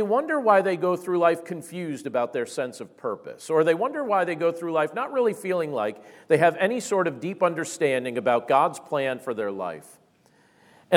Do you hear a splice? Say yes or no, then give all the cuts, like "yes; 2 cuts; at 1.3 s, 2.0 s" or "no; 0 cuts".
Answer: no; 0 cuts